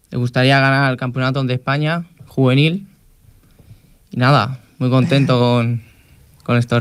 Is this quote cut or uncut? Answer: uncut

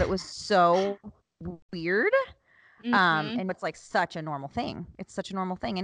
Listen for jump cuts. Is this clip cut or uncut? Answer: cut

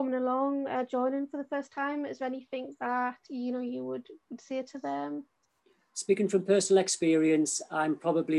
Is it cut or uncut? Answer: uncut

